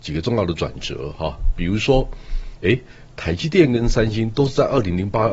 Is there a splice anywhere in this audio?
no; 0 cuts

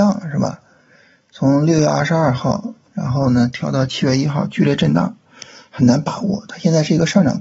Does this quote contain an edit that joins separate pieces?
no; 0 cuts

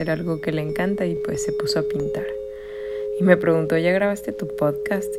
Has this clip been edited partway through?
no; 0 cuts

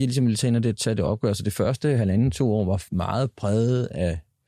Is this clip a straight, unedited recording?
no; 1 cut; at 2.9 s

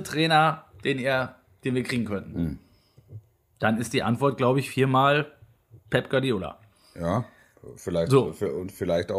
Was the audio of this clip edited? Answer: no; 0 cuts

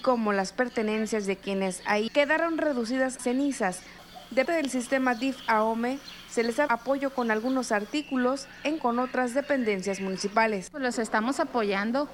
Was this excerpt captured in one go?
no; 5 cuts; at 2.1 s, 3.2 s, 4.4 s, 6.7 s, 8.8 s

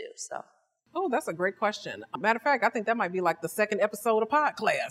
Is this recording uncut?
yes; 0 cuts

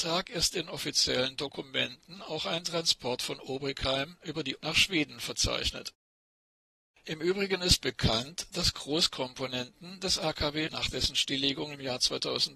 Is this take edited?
yes; 2 cuts; at 4.6 s, 10.7 s

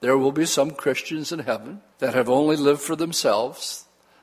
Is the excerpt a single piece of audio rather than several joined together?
no; 1 cut; at 1.9 s

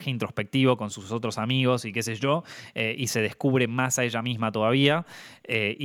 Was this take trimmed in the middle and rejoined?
no; 0 cuts

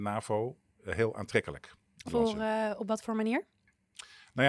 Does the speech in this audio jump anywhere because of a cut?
yes; 1 cut; at 2.1 s

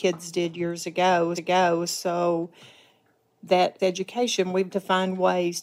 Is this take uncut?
no; 3 cuts; at 1.3 s, 3.8 s, 4.7 s

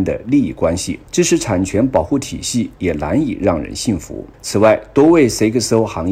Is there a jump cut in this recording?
yes; 2 cuts; at 1.1 s, 4.3 s

